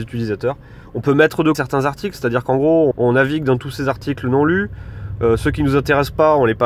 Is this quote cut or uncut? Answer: cut